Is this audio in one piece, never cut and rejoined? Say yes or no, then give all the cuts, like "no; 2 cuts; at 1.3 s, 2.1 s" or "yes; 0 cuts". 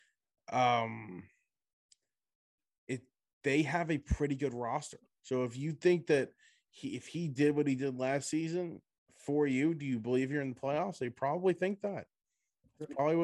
yes; 0 cuts